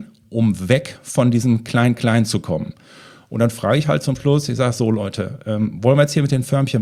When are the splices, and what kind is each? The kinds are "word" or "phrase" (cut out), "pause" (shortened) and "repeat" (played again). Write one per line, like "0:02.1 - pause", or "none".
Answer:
none